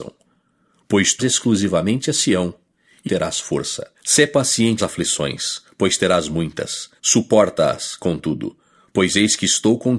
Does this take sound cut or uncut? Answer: cut